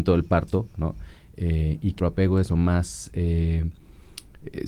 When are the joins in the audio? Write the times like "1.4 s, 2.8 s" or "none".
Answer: 2.0 s, 2.5 s